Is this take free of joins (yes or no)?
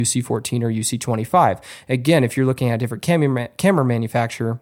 yes